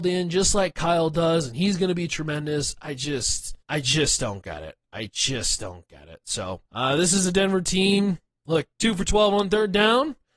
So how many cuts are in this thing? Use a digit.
3